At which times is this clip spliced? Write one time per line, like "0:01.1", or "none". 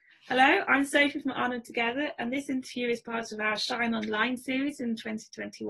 none